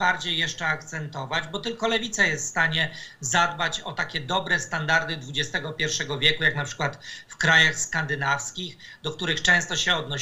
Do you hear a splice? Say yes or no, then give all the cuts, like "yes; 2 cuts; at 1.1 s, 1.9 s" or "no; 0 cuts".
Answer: no; 0 cuts